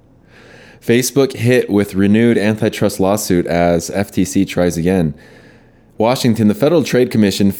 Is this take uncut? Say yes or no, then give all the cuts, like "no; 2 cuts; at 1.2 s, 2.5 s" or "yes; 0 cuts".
yes; 0 cuts